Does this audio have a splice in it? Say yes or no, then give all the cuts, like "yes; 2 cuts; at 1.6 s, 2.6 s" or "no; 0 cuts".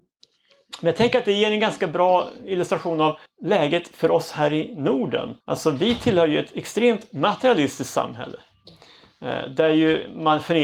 yes; 2 cuts; at 3.3 s, 5.4 s